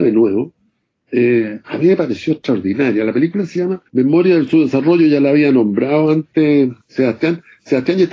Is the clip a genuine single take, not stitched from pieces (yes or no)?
no